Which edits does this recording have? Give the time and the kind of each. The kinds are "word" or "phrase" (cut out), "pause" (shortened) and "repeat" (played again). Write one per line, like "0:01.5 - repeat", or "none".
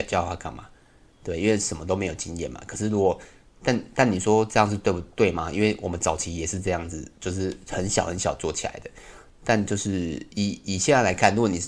none